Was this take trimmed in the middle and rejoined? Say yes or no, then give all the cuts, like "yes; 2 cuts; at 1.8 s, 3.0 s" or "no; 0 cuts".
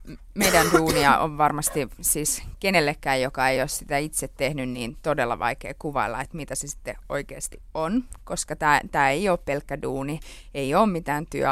no; 0 cuts